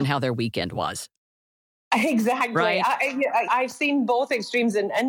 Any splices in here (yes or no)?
yes